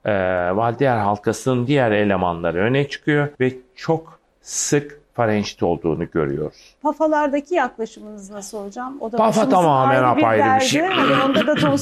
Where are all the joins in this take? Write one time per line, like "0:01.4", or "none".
0:03.3
0:06.8

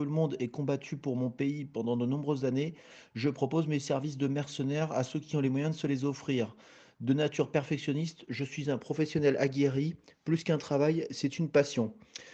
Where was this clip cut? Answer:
none

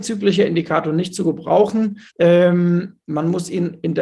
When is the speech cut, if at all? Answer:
0:02.1

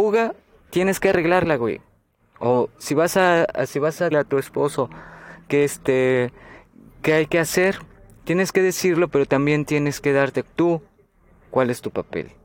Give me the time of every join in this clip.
0:04.1
0:10.4

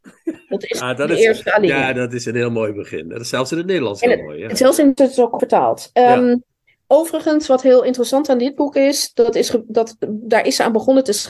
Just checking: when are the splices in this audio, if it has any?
0:05.0
0:05.4

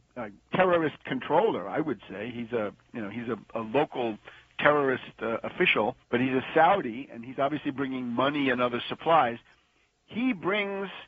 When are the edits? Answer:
0:06.0

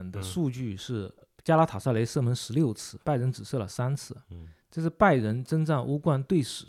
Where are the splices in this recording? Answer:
0:01.2
0:03.0

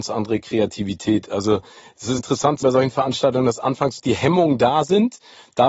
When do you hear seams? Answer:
0:02.2
0:02.6
0:04.0

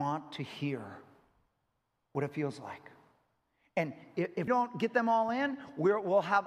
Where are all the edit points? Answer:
0:04.5

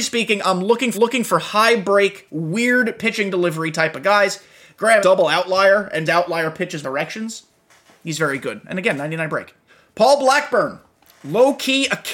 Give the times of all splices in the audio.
0:00.9
0:05.0
0:06.1
0:06.8
0:09.7

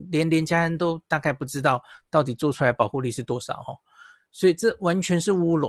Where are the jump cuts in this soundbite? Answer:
none

